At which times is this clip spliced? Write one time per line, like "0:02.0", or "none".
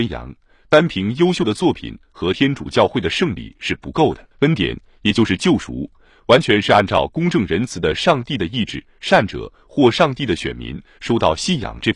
0:04.3